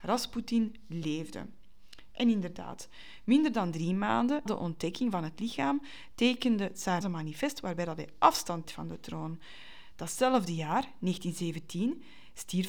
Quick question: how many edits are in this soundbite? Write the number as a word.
three